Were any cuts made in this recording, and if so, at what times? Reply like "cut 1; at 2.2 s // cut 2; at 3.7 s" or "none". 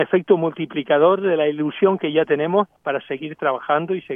cut 1; at 2.8 s